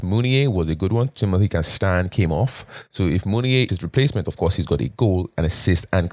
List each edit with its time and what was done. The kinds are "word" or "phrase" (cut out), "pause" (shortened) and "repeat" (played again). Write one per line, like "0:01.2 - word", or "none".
0:03.7 - word